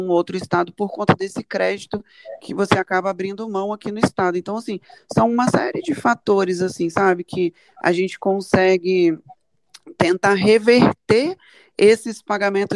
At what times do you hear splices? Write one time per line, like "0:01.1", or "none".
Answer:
none